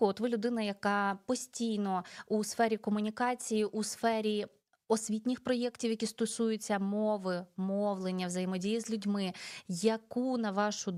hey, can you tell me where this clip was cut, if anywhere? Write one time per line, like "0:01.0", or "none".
none

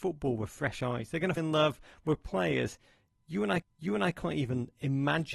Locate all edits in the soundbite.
0:01.4
0:03.6

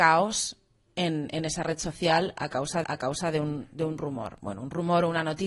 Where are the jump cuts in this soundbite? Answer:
0:02.8

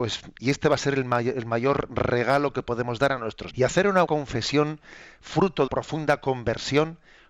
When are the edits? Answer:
0:03.5
0:04.1
0:05.7

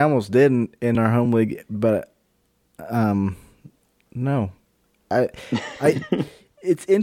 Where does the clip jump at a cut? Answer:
none

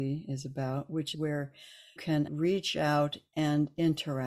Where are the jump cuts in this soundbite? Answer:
0:01.1
0:02.0
0:02.3

